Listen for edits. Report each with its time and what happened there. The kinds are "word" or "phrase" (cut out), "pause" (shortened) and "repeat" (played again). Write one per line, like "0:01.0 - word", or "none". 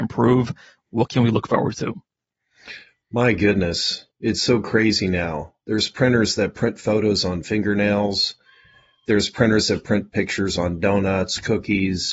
0:04.1 - pause